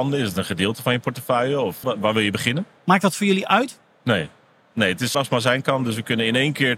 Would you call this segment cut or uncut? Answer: cut